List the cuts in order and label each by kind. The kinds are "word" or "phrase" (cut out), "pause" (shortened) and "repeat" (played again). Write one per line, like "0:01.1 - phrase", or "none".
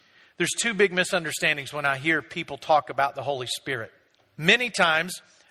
0:04.2 - pause